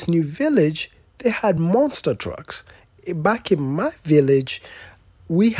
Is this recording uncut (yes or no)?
yes